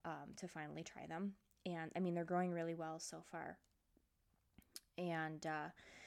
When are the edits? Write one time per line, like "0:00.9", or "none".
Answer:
none